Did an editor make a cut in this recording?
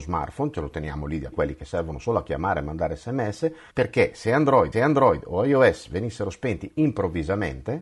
yes; 3 cuts; at 1.3 s, 3.7 s, 4.7 s

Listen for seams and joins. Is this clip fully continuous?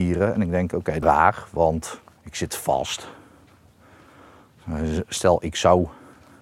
no; 2 cuts; at 1.0 s, 2.2 s

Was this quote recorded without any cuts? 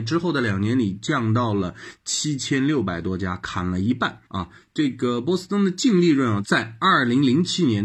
no; 1 cut; at 4.3 s

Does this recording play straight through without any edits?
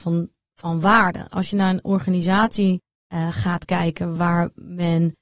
yes; 0 cuts

